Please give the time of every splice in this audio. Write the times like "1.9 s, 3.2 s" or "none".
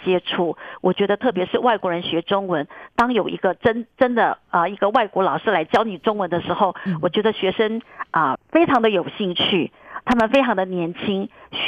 8.4 s